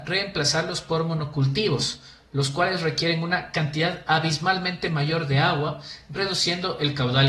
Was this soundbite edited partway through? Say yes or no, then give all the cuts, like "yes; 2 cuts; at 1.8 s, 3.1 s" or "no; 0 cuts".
no; 0 cuts